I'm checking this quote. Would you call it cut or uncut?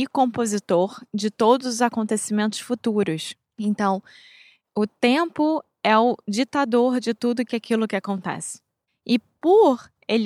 uncut